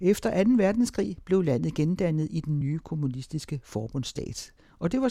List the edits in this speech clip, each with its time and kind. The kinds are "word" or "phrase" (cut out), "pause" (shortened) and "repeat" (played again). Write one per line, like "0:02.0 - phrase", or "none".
none